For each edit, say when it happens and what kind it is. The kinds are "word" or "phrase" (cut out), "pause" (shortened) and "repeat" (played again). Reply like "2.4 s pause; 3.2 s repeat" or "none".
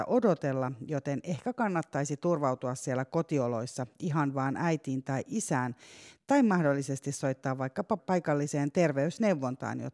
none